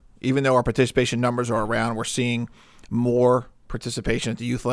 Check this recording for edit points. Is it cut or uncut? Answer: uncut